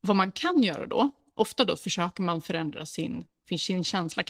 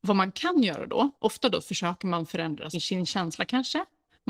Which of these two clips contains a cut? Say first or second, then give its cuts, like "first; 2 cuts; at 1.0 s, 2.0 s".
second; 2 cuts; at 1.1 s, 2.7 s